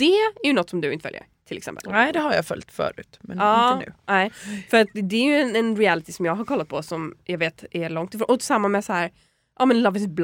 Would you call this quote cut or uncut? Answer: uncut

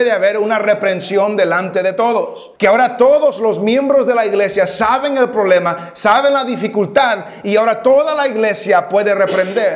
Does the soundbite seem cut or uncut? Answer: cut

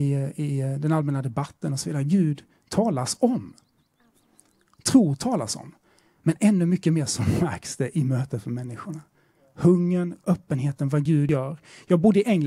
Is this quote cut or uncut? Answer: uncut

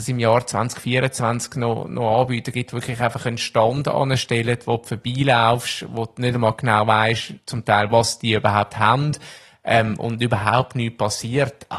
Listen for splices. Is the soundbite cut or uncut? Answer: uncut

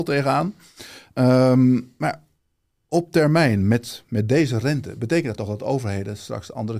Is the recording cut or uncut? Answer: uncut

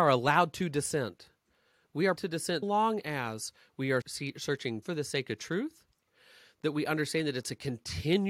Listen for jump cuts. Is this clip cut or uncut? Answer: cut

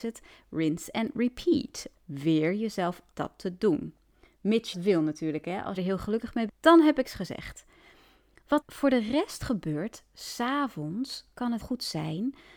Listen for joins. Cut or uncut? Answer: cut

